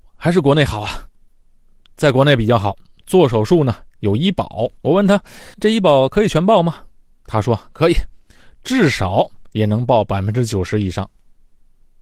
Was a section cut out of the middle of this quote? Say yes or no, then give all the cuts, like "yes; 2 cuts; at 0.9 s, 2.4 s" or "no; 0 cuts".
yes; 2 cuts; at 4.8 s, 5.5 s